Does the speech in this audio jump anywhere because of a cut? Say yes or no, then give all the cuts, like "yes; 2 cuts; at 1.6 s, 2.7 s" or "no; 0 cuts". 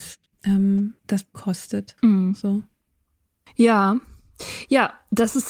yes; 1 cut; at 1.3 s